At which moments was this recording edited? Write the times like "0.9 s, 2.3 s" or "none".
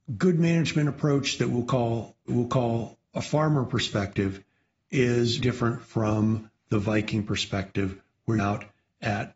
2.3 s, 5.4 s, 8.4 s